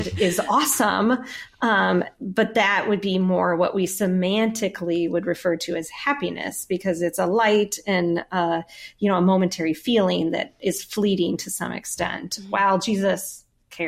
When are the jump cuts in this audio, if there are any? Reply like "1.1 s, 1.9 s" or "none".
none